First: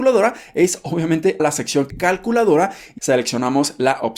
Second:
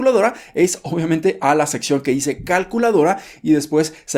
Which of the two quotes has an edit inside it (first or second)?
first